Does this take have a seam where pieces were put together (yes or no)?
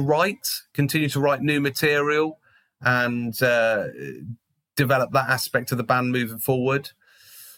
no